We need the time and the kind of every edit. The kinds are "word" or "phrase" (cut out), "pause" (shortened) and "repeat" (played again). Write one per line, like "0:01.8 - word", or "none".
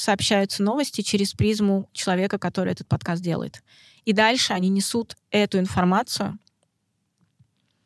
none